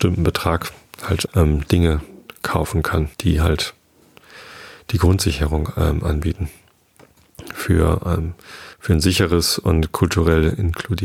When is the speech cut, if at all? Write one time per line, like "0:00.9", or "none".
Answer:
0:01.3
0:03.1
0:08.7